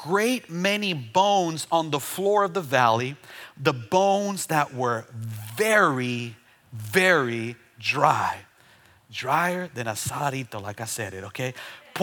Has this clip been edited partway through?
no; 0 cuts

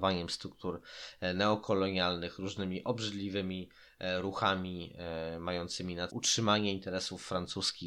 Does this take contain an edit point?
yes; 1 cut; at 6.1 s

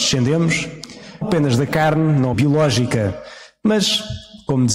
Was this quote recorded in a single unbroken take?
no; 2 cuts; at 1.2 s, 2.3 s

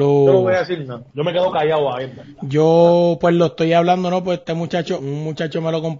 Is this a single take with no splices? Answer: no; 1 cut; at 5.0 s

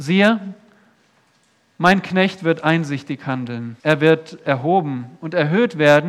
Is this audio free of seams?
no; 1 cut; at 3.8 s

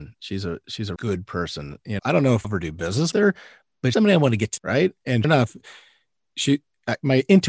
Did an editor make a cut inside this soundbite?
yes; 7 cuts; at 1.0 s, 2.0 s, 2.4 s, 3.1 s, 3.9 s, 4.6 s, 5.2 s

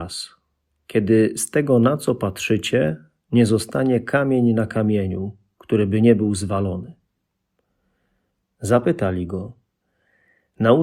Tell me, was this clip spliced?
no; 0 cuts

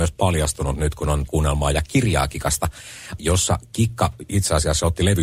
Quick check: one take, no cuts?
no; 2 cuts; at 1.3 s, 3.2 s

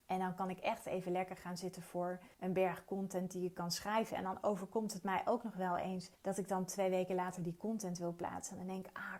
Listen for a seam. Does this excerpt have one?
yes; 2 cuts; at 2.3 s, 6.1 s

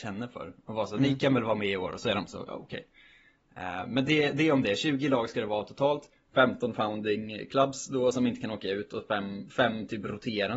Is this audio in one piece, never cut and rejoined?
yes; 0 cuts

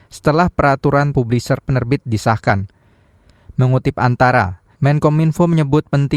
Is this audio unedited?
no; 3 cuts; at 1.1 s, 1.6 s, 4.7 s

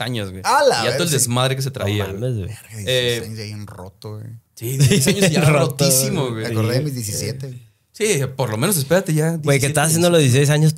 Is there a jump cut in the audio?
no; 0 cuts

